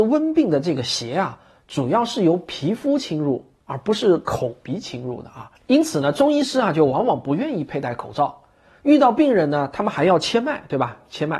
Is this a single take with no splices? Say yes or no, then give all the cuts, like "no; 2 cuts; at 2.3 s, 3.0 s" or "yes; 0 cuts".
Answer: no; 1 cut; at 5.6 s